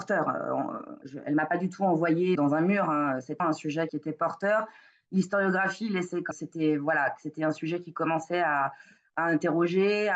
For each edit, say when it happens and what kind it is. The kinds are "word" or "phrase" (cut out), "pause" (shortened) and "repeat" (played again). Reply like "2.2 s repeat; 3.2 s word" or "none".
2.3 s word; 3.4 s word; 3.9 s phrase; 6.3 s phrase